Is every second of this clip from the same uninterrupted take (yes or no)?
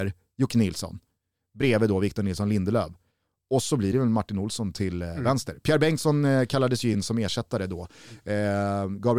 yes